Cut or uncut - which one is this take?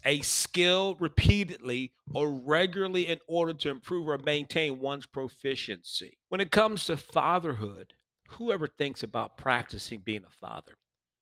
cut